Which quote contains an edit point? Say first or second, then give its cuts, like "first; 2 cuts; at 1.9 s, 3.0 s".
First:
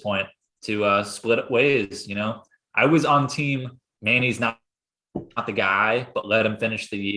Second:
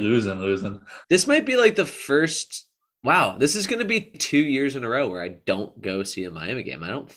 second; 2 cuts; at 1.0 s, 4.1 s